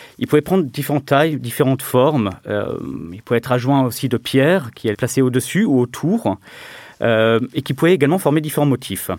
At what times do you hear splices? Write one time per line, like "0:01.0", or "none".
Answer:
0:04.9